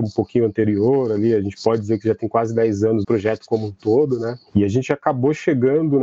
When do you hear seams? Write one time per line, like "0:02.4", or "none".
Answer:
0:03.0
0:04.5